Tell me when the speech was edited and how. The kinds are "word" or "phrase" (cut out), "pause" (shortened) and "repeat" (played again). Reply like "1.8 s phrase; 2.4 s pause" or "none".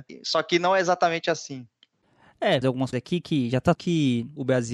2.6 s phrase; 2.9 s word; 3.7 s phrase